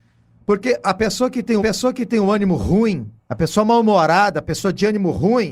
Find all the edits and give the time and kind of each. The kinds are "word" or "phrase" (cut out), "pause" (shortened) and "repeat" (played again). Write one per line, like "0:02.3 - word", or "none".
0:01.6 - repeat
0:03.2 - pause